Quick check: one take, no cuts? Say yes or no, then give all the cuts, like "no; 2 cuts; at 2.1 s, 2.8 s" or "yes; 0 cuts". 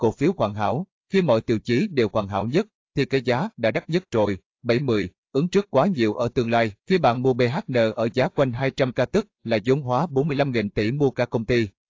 no; 1 cut; at 6.8 s